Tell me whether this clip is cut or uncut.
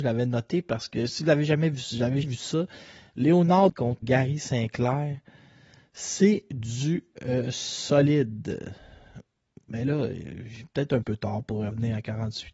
cut